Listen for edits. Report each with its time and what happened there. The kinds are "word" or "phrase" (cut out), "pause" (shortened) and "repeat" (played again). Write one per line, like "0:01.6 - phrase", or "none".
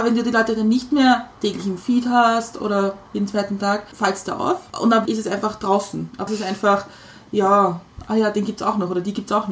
0:05.1 - word
0:06.3 - word